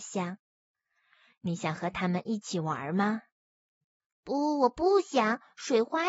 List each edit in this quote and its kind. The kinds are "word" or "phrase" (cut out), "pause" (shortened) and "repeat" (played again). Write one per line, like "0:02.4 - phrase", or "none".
none